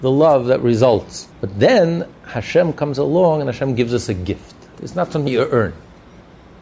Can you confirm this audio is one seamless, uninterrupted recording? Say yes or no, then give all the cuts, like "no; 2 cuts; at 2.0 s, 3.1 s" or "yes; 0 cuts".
no; 3 cuts; at 1.3 s, 4.7 s, 5.3 s